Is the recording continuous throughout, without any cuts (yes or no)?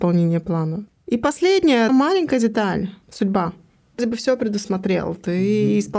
no